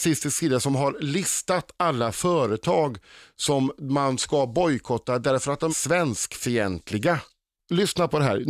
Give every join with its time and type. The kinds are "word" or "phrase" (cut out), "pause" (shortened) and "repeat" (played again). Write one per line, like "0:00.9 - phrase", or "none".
0:05.7 - word